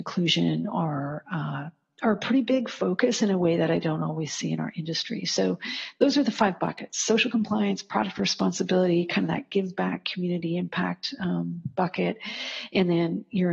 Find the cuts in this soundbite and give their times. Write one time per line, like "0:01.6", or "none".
none